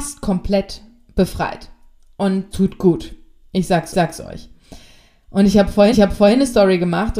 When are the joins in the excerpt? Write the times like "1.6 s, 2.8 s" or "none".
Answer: 2.5 s, 3.9 s, 5.9 s